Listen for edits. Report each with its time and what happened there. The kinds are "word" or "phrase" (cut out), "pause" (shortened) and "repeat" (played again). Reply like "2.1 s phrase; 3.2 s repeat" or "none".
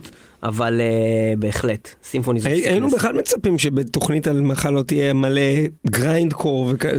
5.8 s pause